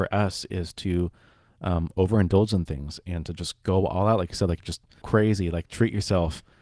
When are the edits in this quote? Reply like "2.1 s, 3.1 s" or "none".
5.0 s